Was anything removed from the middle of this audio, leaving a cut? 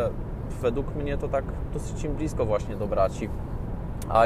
no; 0 cuts

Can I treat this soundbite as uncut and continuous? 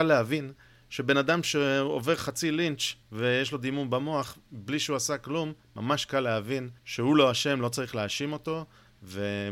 no; 2 cuts; at 3.0 s, 6.8 s

